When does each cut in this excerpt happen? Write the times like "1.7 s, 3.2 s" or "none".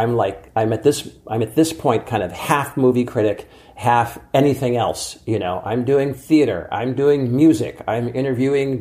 none